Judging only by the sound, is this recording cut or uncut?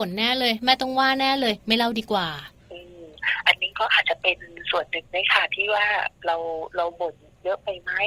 cut